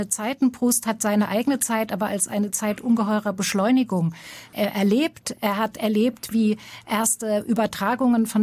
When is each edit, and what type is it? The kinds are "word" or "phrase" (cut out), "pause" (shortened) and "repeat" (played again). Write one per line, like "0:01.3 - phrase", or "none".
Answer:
none